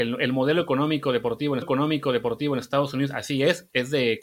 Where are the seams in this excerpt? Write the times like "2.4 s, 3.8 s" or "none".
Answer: 1.6 s